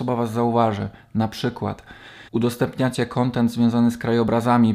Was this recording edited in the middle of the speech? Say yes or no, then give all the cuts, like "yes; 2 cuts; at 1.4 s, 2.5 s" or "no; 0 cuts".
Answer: yes; 1 cut; at 2.3 s